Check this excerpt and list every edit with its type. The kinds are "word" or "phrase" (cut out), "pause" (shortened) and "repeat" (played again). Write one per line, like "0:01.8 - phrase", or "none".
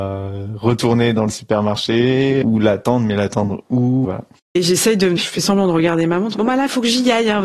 0:02.4 - word
0:04.0 - word
0:05.2 - word